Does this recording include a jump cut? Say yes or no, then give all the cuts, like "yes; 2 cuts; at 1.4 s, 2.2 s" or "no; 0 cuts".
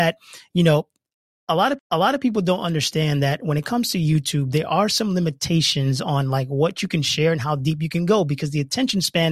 yes; 1 cut; at 1.8 s